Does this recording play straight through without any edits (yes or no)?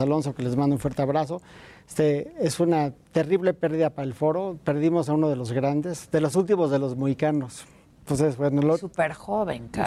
yes